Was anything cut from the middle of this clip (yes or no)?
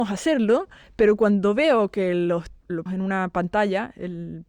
yes